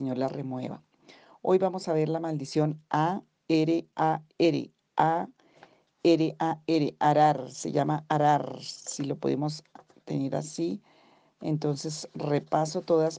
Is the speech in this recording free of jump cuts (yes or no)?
yes